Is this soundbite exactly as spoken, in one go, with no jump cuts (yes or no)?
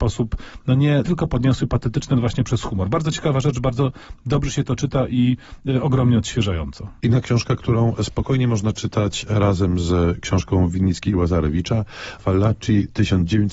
no